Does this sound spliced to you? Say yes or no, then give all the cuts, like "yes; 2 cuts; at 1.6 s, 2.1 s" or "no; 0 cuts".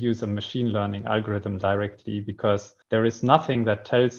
yes; 1 cut; at 2.8 s